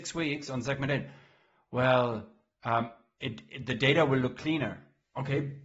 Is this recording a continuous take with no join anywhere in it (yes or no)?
yes